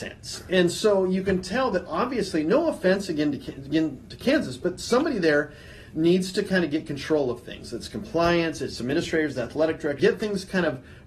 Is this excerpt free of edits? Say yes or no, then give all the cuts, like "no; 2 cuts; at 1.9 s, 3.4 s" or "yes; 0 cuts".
no; 1 cut; at 10.0 s